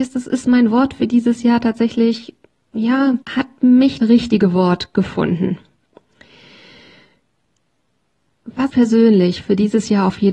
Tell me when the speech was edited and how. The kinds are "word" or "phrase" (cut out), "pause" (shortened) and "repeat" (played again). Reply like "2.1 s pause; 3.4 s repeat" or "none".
3.2 s pause; 4.0 s word; 8.7 s phrase